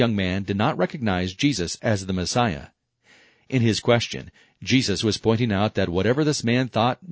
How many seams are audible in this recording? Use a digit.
0